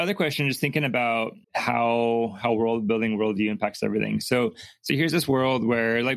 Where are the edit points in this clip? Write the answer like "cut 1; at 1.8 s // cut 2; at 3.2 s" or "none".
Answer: cut 1; at 1.4 s